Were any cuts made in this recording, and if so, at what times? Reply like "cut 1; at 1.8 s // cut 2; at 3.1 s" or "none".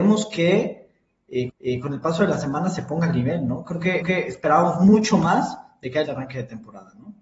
cut 1; at 1.5 s // cut 2; at 4.0 s // cut 3; at 6.1 s